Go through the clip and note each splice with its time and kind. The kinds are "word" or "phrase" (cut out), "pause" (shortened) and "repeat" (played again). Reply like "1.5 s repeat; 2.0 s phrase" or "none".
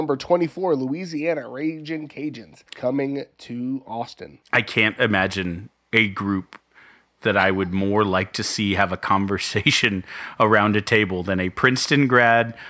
2.7 s pause